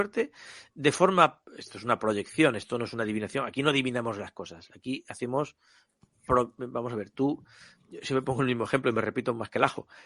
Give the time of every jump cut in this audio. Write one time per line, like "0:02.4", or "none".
0:01.5